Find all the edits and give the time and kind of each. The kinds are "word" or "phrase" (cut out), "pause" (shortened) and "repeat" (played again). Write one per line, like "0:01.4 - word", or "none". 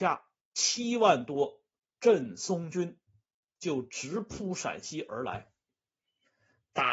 none

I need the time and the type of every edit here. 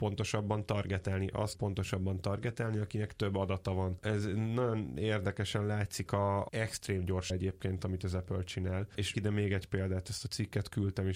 0:01.5 - word
0:06.1 - word
0:07.3 - word
0:09.1 - word

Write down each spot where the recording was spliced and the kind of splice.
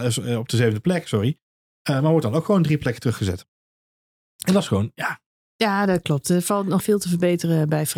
0:06.8 - word

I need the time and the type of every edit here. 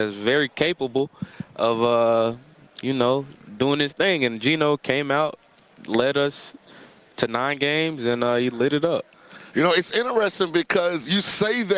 none

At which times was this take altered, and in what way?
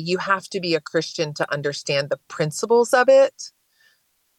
none

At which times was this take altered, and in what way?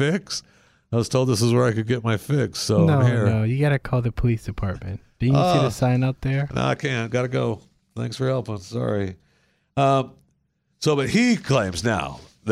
none

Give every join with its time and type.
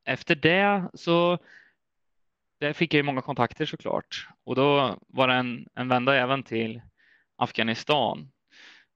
none

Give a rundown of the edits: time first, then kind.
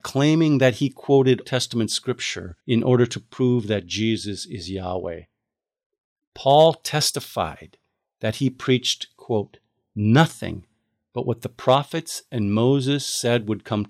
0:01.4 - word
0:02.6 - pause

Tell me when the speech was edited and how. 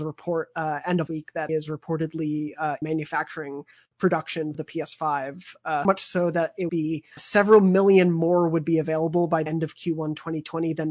0:01.1 - word
0:01.5 - word
0:02.8 - word
0:04.5 - word
0:05.8 - word
0:06.7 - word
0:07.2 - word
0:09.5 - word

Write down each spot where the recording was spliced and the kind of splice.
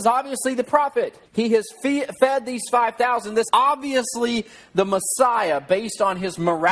0:01.3 - pause
0:03.5 - word

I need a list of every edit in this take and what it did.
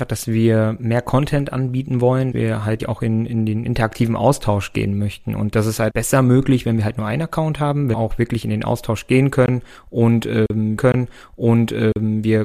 0:02.3 - word
0:02.8 - word
0:05.9 - word
0:07.9 - phrase
0:10.8 - repeat

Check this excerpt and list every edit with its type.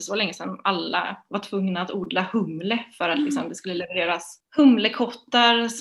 0:04.4 - pause

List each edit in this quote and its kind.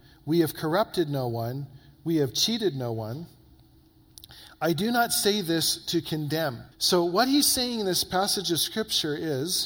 0:06.7 - pause

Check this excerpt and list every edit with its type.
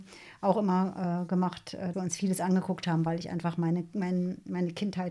0:01.9 - word

